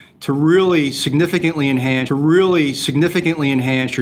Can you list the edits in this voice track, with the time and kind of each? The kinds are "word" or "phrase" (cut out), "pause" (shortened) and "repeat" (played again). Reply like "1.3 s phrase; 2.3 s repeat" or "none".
2.1 s repeat